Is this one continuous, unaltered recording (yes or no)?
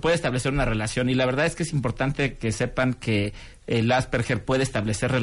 yes